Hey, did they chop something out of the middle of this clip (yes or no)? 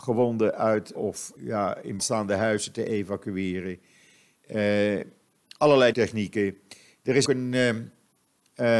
yes